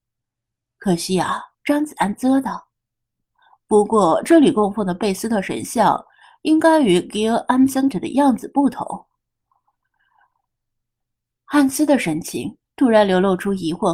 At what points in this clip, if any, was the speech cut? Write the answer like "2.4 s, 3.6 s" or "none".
1.5 s, 7.9 s

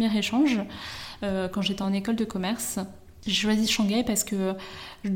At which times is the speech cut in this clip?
none

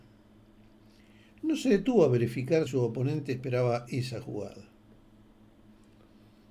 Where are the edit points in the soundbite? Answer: 2.7 s

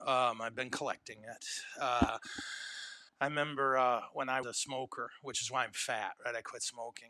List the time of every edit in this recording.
3.1 s, 4.4 s

